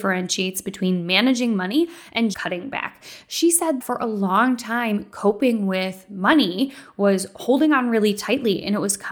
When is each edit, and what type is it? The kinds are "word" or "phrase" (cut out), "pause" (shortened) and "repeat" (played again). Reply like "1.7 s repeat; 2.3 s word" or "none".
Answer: 2.3 s word; 3.8 s word